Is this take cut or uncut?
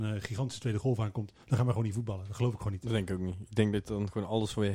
uncut